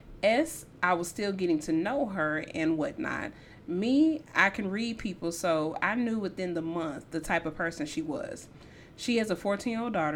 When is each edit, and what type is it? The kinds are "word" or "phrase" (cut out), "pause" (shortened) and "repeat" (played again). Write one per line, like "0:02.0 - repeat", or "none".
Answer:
none